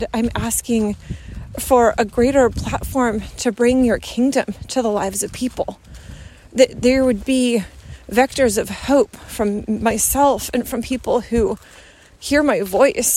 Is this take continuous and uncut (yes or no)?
yes